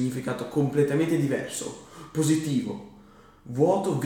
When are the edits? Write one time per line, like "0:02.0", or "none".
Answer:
none